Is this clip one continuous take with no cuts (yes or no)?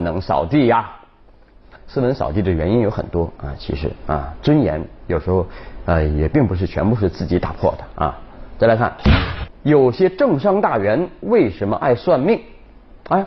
no